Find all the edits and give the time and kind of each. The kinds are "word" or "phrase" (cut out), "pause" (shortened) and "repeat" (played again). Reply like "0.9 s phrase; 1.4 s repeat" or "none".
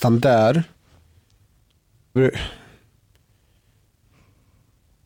2.2 s word